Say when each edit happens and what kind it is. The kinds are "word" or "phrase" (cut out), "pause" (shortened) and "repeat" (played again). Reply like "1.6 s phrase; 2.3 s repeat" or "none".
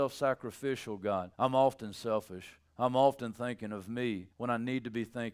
1.3 s pause; 2.7 s pause; 4.3 s pause